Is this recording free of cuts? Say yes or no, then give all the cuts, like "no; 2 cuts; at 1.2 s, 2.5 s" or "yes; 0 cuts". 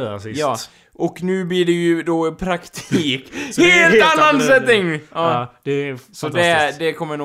yes; 0 cuts